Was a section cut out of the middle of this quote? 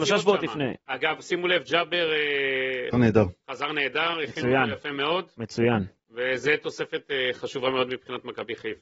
yes; 1 cut; at 2.9 s

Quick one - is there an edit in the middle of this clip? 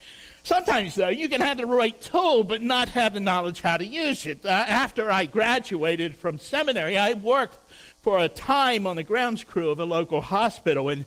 yes; 1 cut; at 7.9 s

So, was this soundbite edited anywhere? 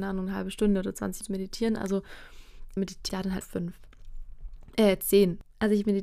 yes; 4 cuts; at 1.2 s, 2.8 s, 3.1 s, 3.4 s

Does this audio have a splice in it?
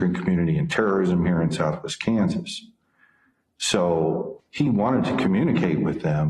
no; 0 cuts

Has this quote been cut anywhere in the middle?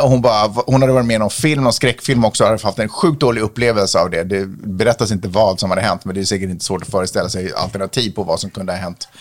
no; 0 cuts

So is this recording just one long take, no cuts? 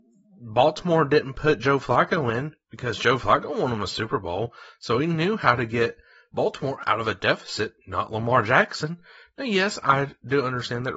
yes; 0 cuts

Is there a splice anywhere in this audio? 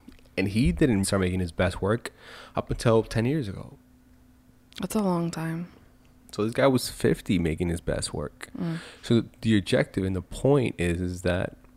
yes; 1 cut; at 1.0 s

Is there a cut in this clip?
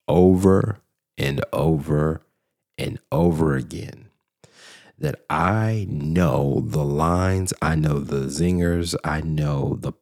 no; 0 cuts

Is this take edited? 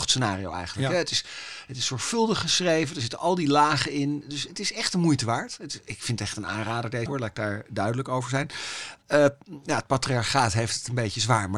yes; 2 cuts; at 4.5 s, 7.1 s

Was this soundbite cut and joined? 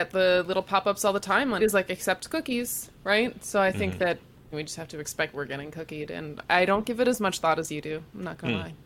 yes; 4 cuts; at 1.6 s, 4.5 s, 5.3 s, 6.5 s

